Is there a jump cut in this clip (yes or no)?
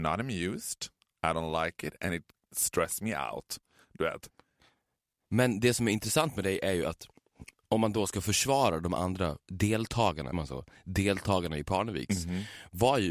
yes